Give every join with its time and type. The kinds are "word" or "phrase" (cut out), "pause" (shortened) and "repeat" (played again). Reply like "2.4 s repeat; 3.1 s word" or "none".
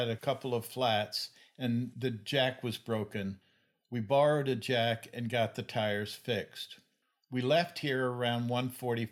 none

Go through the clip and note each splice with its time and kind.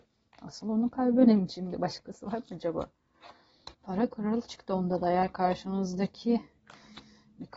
3.7 s pause

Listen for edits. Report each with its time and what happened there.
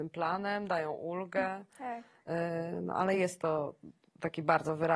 none

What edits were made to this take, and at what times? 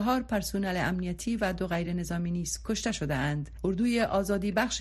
none

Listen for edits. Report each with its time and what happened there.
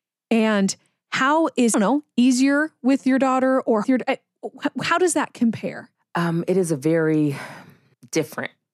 1.7 s phrase; 3.8 s phrase

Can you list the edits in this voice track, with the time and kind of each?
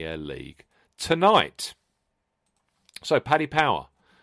none

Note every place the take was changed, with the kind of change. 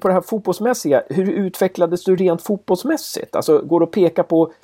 none

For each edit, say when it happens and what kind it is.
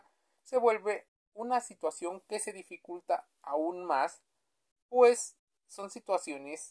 none

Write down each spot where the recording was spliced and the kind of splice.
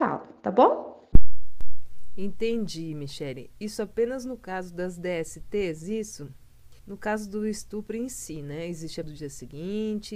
6.8 s pause; 9.0 s word

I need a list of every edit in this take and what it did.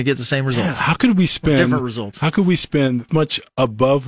3.1 s word

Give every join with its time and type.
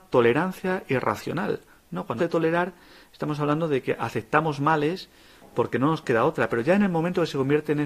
2.2 s word

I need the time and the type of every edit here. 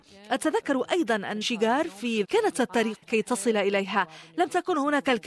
1.4 s word; 2.2 s phrase; 3.0 s word

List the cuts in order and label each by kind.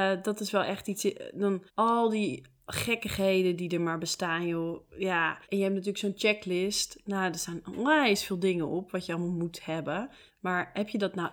1.7 s pause; 5.4 s pause; 10.3 s pause

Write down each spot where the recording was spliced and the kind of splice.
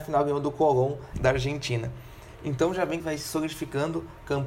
1.1 s phrase; 3.0 s word

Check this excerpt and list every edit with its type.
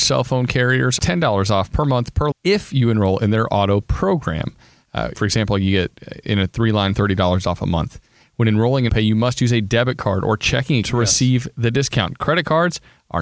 1.0 s word; 2.3 s word; 3.8 s word; 5.1 s word; 6.9 s word; 8.9 s word; 10.8 s word

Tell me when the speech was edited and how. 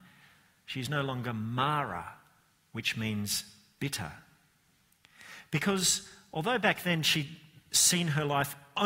none

